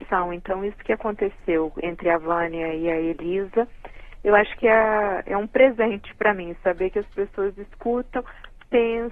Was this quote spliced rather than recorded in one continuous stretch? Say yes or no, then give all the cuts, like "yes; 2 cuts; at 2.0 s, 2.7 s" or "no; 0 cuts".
no; 0 cuts